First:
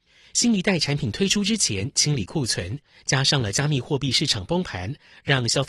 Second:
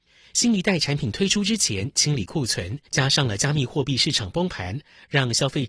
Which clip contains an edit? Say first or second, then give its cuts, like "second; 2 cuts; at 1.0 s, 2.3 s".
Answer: second; 1 cut; at 2.8 s